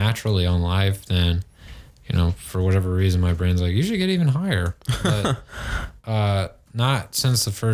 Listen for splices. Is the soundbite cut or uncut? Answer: uncut